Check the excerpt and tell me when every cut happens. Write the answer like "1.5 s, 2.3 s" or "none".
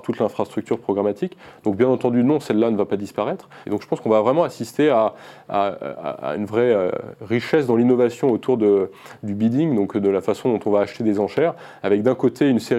3.6 s